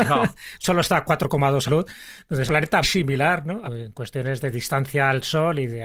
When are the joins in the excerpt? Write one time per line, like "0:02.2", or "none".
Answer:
0:01.6
0:02.5
0:02.8
0:03.6